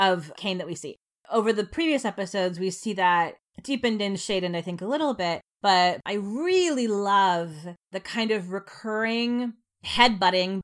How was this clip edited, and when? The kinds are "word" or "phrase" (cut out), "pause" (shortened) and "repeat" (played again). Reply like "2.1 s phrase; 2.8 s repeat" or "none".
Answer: none